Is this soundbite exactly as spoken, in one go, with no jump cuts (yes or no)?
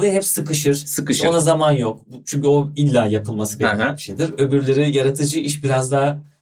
yes